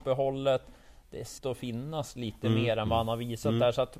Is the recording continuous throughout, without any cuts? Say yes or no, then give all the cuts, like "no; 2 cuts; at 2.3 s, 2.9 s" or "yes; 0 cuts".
no; 1 cut; at 1.4 s